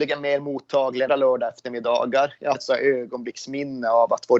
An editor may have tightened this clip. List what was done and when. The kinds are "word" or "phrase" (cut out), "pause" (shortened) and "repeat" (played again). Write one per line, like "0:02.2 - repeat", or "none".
0:01.1 - word
0:02.5 - word